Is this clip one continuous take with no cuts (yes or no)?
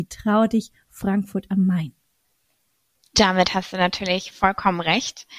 yes